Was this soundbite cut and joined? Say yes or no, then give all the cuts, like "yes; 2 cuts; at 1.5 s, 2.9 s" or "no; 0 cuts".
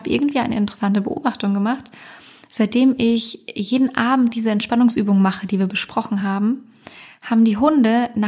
no; 0 cuts